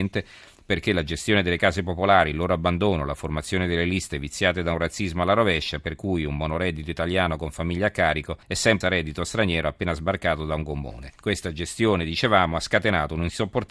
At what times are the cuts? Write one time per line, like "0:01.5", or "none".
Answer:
0:08.4
0:08.8
0:11.2